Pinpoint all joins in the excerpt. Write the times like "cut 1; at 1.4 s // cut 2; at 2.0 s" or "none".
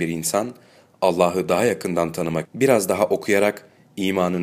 cut 1; at 2.4 s